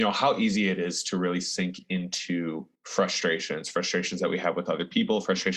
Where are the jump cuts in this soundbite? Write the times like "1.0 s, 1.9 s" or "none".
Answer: 2.7 s